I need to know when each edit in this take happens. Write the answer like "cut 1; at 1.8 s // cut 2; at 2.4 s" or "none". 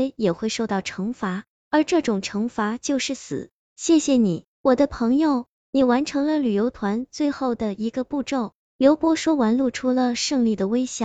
cut 1; at 4.5 s

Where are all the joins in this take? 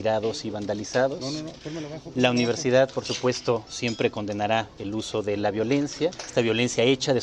cut 1; at 6.2 s

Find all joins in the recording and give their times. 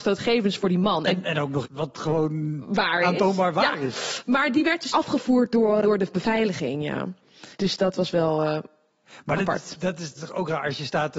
cut 1; at 1.6 s // cut 2; at 4.9 s // cut 3; at 5.8 s // cut 4; at 7.5 s // cut 5; at 10.2 s

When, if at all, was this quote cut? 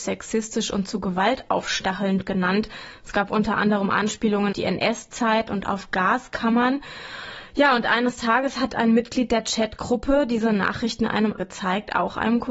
cut 1; at 4.5 s // cut 2; at 11.4 s

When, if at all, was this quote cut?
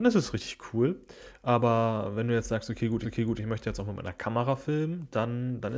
cut 1; at 3.0 s

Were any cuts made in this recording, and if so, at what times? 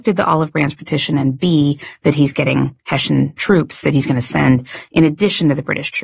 none

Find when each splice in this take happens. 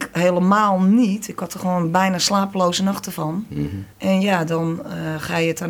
cut 1; at 3.9 s

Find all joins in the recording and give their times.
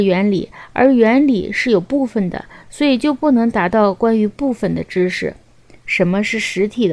none

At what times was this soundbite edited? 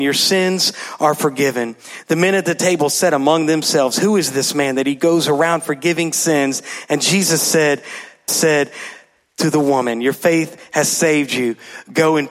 cut 1; at 8.3 s

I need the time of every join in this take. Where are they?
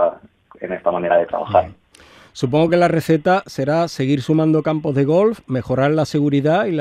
none

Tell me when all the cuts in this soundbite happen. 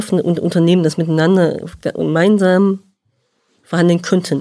none

